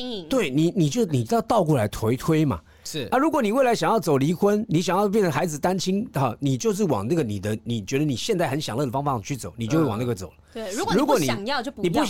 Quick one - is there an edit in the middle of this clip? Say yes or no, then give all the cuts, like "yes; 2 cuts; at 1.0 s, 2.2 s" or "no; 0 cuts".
no; 0 cuts